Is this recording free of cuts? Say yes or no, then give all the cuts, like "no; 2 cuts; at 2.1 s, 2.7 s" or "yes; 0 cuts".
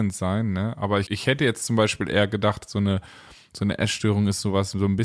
no; 1 cut; at 1.1 s